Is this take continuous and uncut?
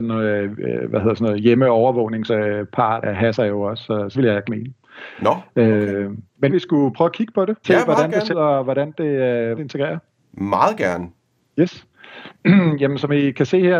no; 8 cuts; at 2.3 s, 3.0 s, 4.1 s, 4.4 s, 6.5 s, 7.6 s, 8.3 s, 9.6 s

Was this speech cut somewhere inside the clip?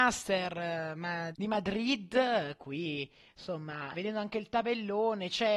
yes; 2 cuts; at 1.3 s, 3.9 s

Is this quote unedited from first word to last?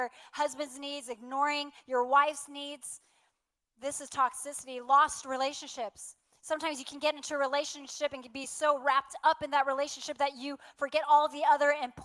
yes; 0 cuts

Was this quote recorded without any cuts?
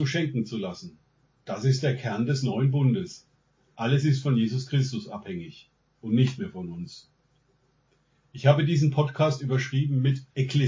yes; 0 cuts

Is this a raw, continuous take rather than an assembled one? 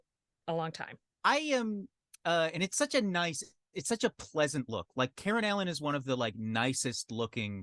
yes; 0 cuts

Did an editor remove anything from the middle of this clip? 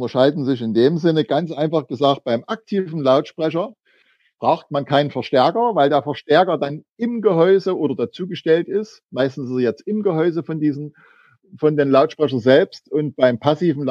no; 0 cuts

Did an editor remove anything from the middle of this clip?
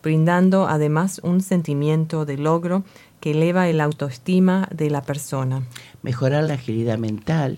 no; 0 cuts

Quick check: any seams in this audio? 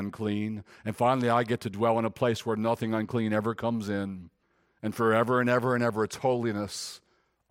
yes; 1 cut; at 4.4 s

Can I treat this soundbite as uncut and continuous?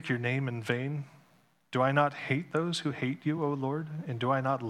yes; 0 cuts

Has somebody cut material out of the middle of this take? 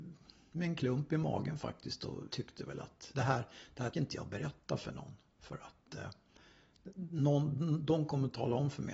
yes; 3 cuts; at 2.3 s, 3.1 s, 3.9 s

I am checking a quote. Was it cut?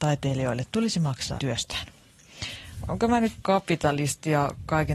yes; 2 cuts; at 1.4 s, 3.4 s

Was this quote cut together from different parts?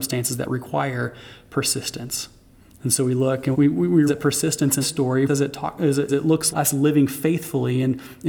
yes; 6 cuts; at 3.5 s, 4.1 s, 4.8 s, 5.3 s, 6.1 s, 6.5 s

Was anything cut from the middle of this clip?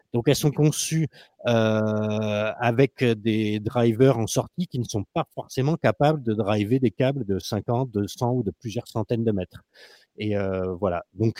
no; 0 cuts

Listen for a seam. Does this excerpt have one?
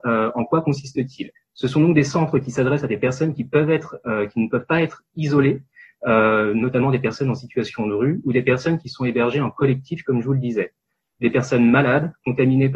yes; 1 cut; at 1.3 s

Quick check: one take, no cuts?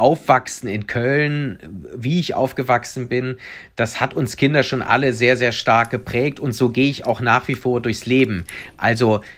yes; 0 cuts

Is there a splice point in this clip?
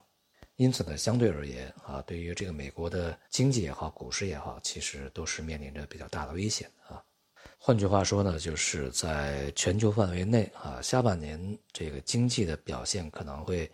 yes; 2 cuts; at 3.2 s, 7.5 s

